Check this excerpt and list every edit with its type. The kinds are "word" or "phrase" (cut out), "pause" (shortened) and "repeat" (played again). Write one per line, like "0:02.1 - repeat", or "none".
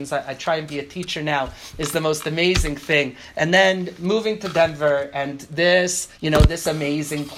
0:06.1 - pause